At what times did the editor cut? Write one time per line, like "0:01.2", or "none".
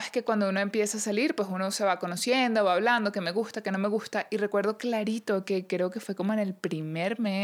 none